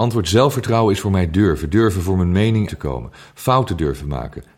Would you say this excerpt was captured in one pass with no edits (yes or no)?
no